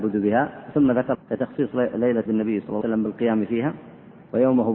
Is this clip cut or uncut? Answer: cut